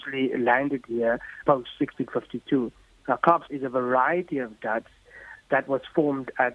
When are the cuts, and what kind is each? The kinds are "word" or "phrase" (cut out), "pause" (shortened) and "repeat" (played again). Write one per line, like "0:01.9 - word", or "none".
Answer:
0:01.4 - word
0:03.5 - word
0:05.4 - word